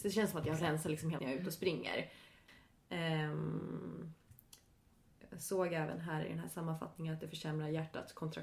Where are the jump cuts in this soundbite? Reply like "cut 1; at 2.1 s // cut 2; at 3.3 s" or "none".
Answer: cut 1; at 1.2 s